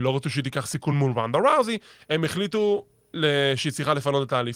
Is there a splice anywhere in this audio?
no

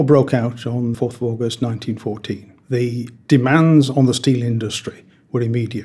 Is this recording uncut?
no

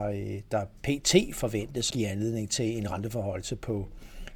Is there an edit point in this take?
yes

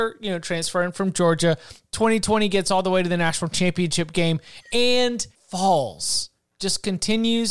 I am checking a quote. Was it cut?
yes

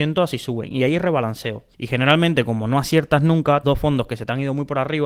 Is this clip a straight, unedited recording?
no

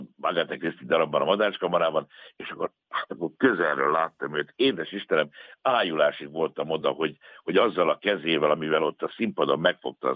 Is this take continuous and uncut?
yes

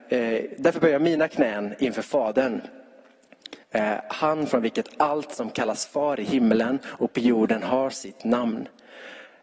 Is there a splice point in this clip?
yes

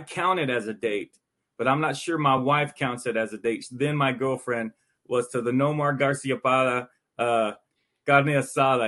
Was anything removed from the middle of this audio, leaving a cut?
no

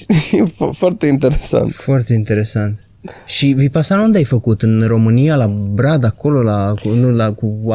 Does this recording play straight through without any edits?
yes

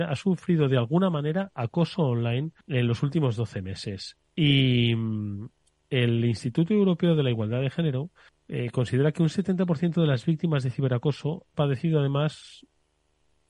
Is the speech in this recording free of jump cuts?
no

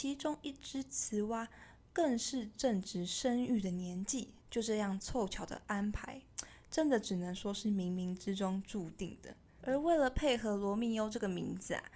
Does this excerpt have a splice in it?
yes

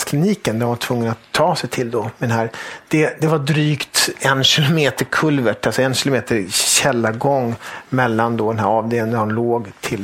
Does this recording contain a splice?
no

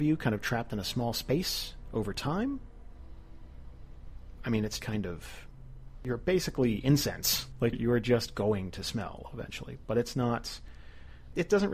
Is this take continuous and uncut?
no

